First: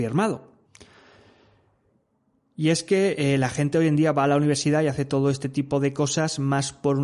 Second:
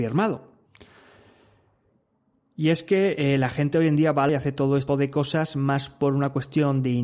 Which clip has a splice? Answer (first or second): second